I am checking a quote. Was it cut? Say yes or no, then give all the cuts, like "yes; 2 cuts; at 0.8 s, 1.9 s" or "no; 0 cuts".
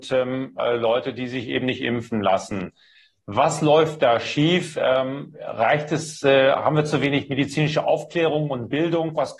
no; 0 cuts